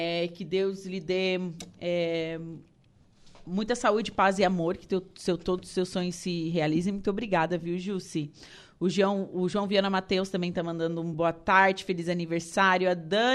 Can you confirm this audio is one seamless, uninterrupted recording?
yes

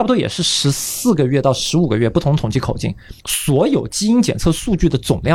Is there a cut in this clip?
yes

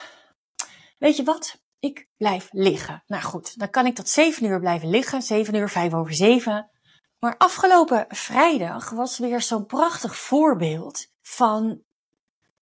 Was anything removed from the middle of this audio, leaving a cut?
no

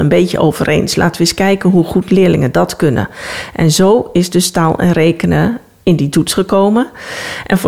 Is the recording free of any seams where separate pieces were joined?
yes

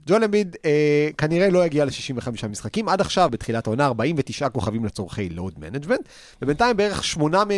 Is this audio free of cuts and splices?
no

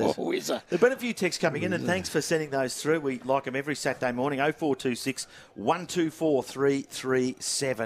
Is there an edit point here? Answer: no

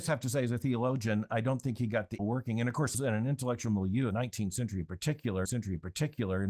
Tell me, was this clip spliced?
yes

